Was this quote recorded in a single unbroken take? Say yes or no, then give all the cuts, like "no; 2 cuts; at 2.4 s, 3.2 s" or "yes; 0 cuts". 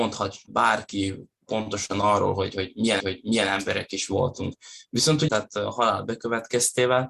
no; 2 cuts; at 3.0 s, 5.3 s